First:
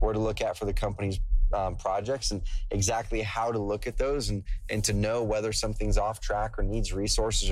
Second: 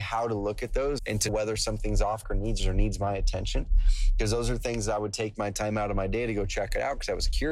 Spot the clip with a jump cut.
second; 4 cuts; at 1.0 s, 1.3 s, 2.2 s, 2.6 s

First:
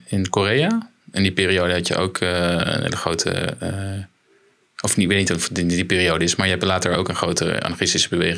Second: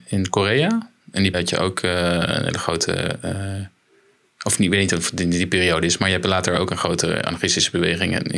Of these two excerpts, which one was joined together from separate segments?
second; 1 cut; at 1.3 s

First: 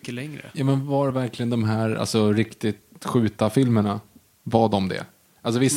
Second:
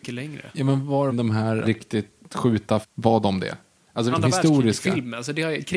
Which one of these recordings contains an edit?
second; 4 cuts; at 1.1 s, 1.6 s, 2.8 s, 4.1 s

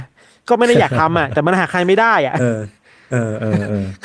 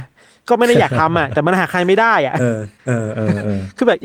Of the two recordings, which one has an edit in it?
second; 1 cut; at 2.8 s

